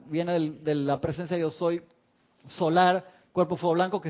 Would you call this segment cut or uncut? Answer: uncut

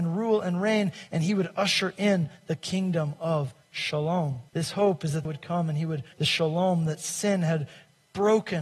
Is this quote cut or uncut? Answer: cut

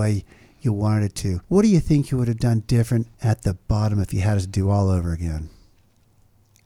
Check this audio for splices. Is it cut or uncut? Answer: cut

